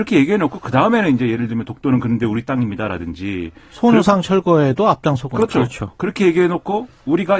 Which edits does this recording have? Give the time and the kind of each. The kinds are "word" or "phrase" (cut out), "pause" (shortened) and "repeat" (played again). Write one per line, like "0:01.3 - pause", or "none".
none